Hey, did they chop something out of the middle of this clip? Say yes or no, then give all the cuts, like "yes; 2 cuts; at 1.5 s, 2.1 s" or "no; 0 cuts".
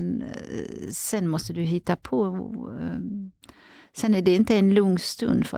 no; 0 cuts